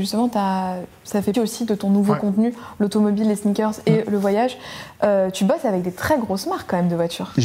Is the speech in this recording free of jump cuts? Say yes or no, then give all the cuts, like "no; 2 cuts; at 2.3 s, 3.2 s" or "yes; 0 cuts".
no; 1 cut; at 1.3 s